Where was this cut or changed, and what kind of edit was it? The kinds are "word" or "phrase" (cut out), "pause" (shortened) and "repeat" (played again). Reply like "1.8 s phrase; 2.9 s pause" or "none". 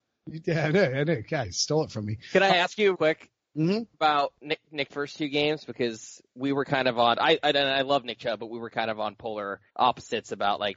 2.9 s word; 3.9 s pause; 4.9 s word; 9.7 s pause